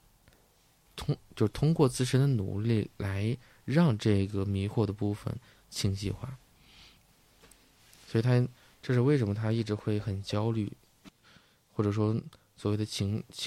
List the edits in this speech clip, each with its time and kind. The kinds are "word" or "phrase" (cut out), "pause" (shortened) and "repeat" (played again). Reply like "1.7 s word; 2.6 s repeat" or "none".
none